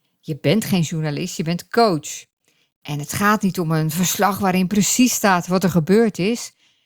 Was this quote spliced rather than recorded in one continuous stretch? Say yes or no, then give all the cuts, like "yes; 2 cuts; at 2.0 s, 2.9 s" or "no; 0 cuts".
no; 0 cuts